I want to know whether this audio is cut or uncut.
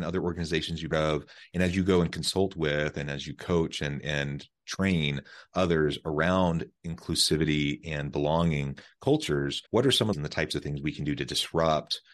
cut